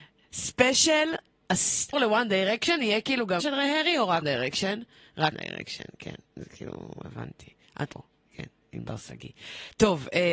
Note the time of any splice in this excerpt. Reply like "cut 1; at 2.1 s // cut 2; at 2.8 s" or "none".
cut 1; at 1.9 s // cut 2; at 3.4 s // cut 3; at 4.2 s // cut 4; at 5.3 s // cut 5; at 7.9 s

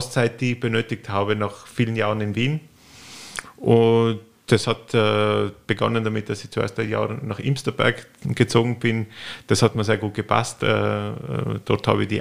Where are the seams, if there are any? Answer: none

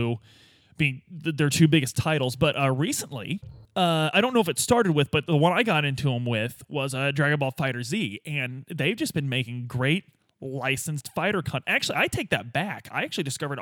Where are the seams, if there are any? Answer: cut 1; at 3.6 s

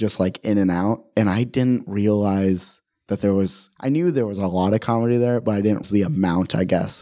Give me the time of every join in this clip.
cut 1; at 5.8 s

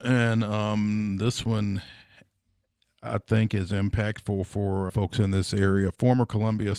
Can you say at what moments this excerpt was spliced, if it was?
cut 1; at 4.9 s

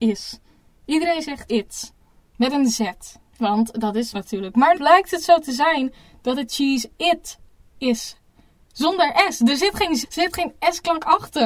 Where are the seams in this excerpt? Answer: cut 1; at 1.5 s // cut 2; at 4.1 s // cut 3; at 4.7 s // cut 4; at 10.0 s

